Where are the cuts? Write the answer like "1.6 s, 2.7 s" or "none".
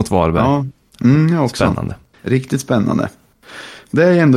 2.1 s

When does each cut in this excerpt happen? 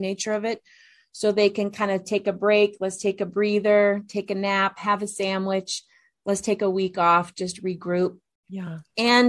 none

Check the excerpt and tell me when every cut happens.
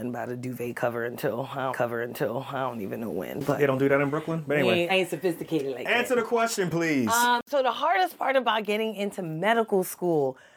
1.7 s, 4.9 s

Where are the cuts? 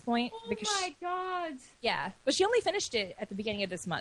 none

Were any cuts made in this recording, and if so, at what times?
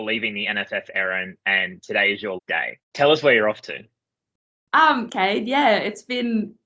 2.4 s, 2.8 s, 5.1 s

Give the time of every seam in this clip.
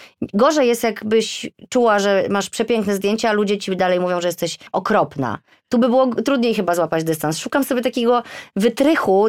4.7 s

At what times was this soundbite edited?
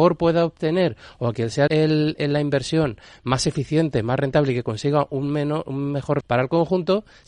1.7 s, 6.2 s

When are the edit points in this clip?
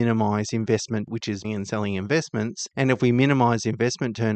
1.1 s, 1.4 s

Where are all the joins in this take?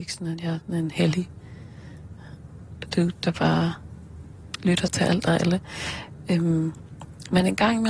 none

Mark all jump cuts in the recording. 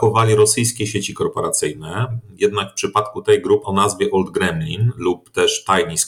3.6 s

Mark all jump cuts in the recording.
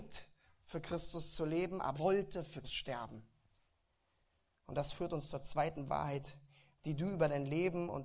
1.9 s, 2.6 s

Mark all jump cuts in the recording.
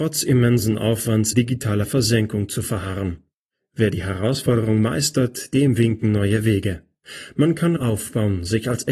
1.3 s, 7.8 s

